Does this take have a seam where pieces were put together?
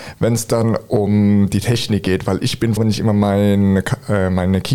yes; 1 cut; at 2.8 s

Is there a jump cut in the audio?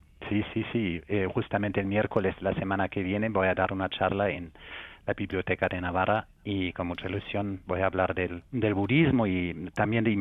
yes; 1 cut; at 8.5 s

